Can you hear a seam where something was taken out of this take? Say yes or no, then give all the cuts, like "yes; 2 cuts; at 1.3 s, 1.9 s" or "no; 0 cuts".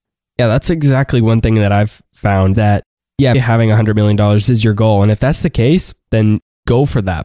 yes; 3 cuts; at 2.5 s, 3.3 s, 6.1 s